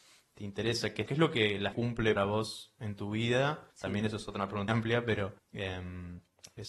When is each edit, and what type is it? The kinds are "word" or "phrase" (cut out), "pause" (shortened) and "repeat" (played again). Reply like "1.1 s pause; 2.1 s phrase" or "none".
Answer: 1.1 s word; 1.7 s word; 2.2 s word; 3.7 s pause; 4.7 s word; 5.4 s pause